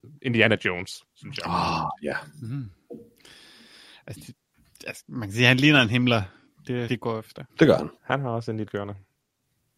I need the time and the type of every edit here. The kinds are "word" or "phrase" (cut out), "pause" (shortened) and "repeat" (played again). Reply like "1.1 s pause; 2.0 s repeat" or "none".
1.1 s pause; 5.0 s word; 6.9 s phrase; 7.5 s pause; 8.0 s pause; 8.7 s word

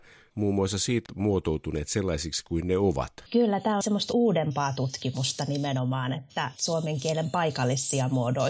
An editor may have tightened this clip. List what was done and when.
1.1 s phrase; 3.3 s pause; 3.8 s phrase

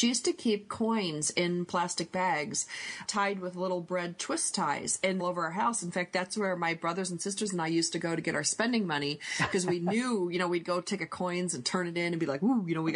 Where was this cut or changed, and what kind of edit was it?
3.0 s word; 5.2 s phrase; 11.0 s phrase

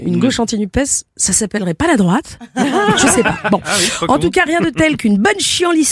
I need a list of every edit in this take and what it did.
none

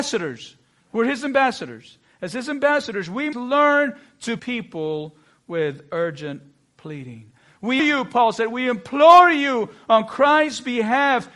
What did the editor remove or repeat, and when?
3.3 s word; 4.4 s word; 7.8 s word

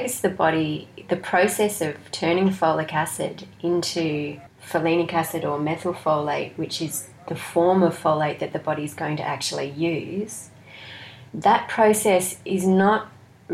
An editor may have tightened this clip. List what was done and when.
11.3 s pause

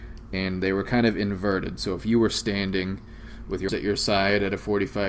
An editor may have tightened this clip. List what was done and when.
3.7 s word

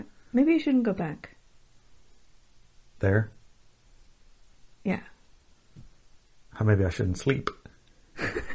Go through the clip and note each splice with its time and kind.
none

